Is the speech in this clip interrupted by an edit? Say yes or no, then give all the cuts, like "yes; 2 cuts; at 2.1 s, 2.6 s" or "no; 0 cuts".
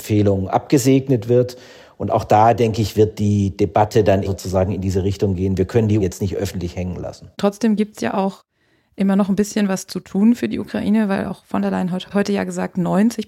yes; 3 cuts; at 4.2 s, 6.0 s, 7.3 s